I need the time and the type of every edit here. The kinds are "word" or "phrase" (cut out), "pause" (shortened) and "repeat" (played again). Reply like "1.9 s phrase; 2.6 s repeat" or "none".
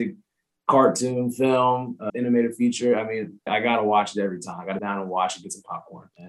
2.1 s word; 3.5 s word; 4.8 s word